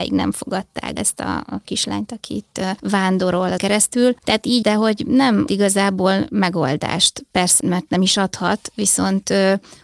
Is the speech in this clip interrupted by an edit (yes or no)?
yes